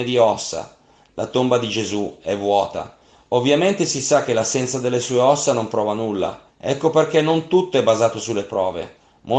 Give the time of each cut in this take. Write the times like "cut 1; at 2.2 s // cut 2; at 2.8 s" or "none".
cut 1; at 3.1 s // cut 2; at 6.5 s